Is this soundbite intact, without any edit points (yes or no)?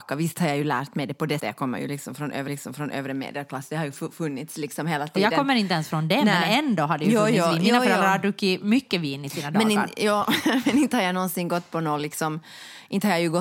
no